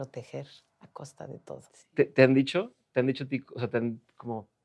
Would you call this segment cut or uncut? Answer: cut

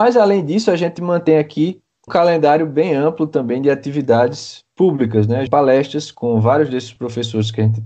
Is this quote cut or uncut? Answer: cut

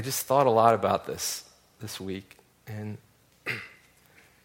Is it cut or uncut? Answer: uncut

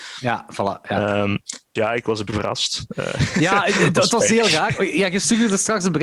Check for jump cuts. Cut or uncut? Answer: cut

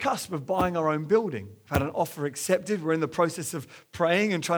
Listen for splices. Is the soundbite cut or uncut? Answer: uncut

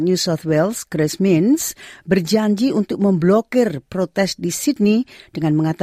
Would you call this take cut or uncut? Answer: uncut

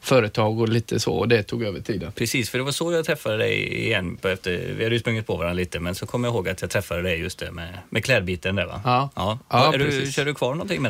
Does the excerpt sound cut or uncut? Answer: uncut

